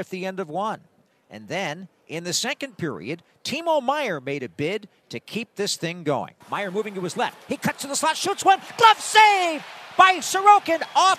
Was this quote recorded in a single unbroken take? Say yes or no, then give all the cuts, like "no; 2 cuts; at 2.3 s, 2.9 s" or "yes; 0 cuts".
no; 1 cut; at 6.4 s